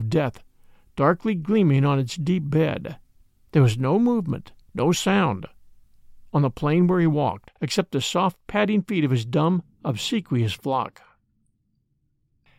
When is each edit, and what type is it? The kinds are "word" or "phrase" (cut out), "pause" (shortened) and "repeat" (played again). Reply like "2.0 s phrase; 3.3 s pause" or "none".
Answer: 3.2 s pause; 4.6 s pause; 7.6 s pause; 9.7 s pause